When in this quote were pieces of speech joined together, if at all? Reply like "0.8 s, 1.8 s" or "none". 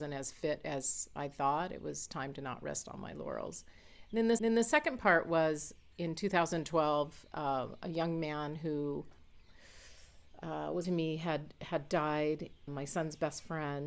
4.4 s, 10.8 s, 12.7 s

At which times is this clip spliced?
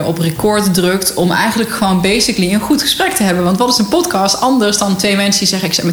none

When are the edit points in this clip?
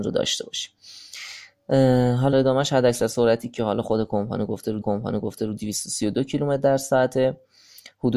2.3 s, 4.8 s

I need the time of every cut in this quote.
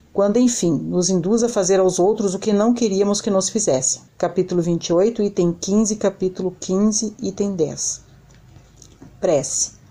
4.1 s

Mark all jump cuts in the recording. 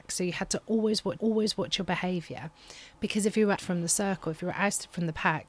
1.2 s, 3.6 s

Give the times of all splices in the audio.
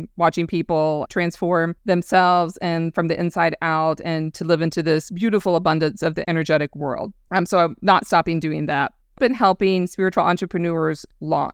9.2 s

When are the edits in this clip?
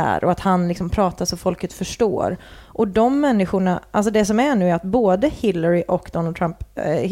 none

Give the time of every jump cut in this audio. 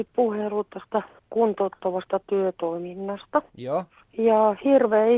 none

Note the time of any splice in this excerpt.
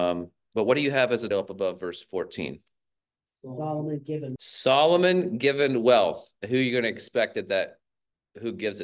1.3 s, 4.4 s, 6.4 s

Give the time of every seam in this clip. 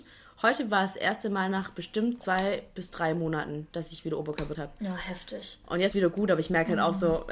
4.5 s, 5.9 s

